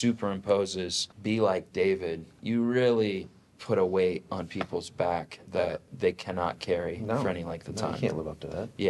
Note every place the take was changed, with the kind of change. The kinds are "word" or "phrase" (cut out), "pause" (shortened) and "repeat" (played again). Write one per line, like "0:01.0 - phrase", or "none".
0:01.1 - pause